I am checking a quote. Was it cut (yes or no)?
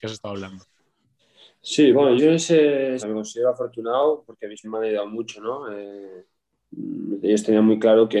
yes